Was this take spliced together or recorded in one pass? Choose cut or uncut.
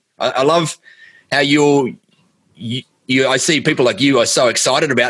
uncut